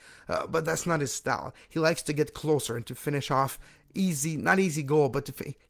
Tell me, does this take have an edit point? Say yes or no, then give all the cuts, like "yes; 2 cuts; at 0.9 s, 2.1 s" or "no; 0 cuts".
no; 0 cuts